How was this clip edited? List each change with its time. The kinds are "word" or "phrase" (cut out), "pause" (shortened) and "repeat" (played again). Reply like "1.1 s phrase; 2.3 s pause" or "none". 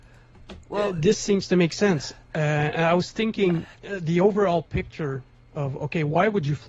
3.7 s pause

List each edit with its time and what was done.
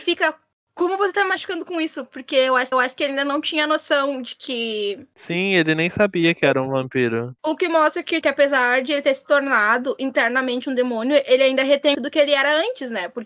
2.7 s repeat; 8.2 s word; 11.9 s word

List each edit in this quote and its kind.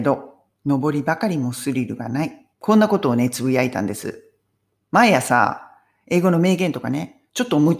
2.5 s pause

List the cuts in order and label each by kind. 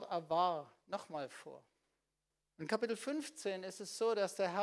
2.3 s pause

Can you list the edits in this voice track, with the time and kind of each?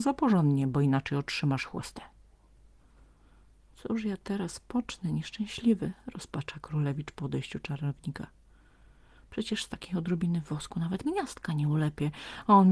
11.0 s word

